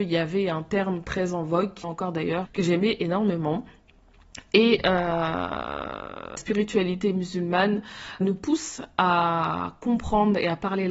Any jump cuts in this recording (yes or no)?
yes